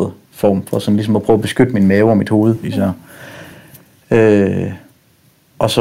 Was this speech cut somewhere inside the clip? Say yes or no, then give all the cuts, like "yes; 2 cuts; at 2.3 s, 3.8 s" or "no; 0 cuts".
no; 0 cuts